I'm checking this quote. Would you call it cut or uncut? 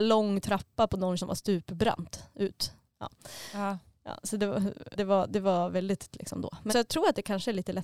cut